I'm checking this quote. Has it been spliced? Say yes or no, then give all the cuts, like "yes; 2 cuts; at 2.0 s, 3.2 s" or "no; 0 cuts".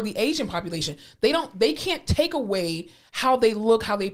no; 0 cuts